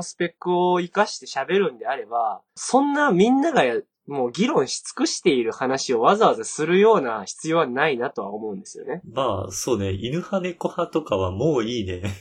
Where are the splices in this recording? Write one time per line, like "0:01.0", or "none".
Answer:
0:02.5